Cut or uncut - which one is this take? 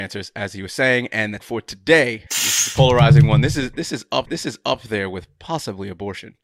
cut